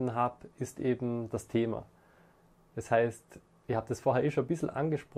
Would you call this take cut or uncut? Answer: uncut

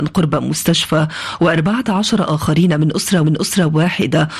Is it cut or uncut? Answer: cut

